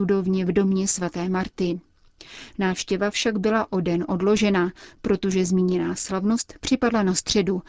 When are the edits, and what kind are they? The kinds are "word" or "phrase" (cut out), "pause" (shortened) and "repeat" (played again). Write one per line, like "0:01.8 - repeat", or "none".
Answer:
none

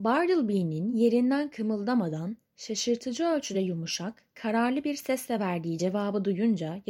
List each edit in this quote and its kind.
none

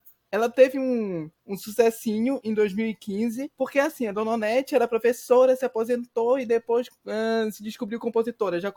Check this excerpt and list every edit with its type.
0:01.4 - pause
0:03.5 - pause
0:07.0 - pause

